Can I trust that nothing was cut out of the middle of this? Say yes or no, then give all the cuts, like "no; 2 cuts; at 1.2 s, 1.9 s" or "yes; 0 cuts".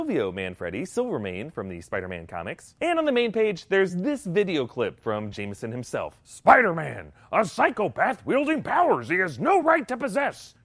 yes; 0 cuts